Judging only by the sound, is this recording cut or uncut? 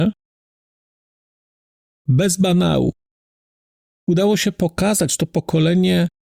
uncut